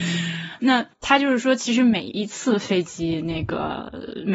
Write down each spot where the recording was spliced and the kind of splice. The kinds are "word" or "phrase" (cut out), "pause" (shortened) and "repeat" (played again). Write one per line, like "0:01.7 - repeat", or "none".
0:00.9 - pause